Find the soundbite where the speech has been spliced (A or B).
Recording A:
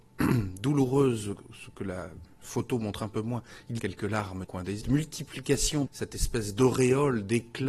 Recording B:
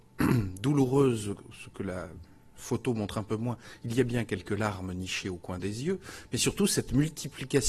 A